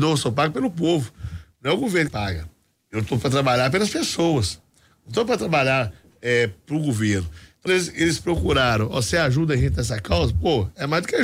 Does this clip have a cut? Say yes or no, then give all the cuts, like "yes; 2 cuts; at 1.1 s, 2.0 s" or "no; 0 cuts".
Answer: yes; 2 cuts; at 2.1 s, 7.7 s